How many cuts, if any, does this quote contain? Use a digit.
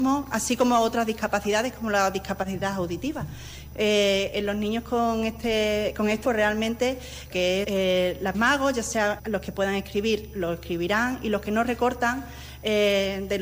5